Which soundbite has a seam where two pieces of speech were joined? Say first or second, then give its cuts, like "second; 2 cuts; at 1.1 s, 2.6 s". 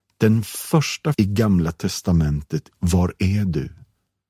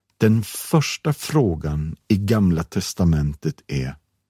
first; 2 cuts; at 1.1 s, 2.7 s